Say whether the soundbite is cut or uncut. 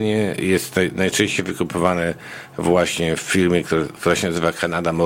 uncut